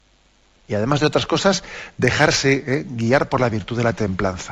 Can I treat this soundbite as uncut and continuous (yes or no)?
yes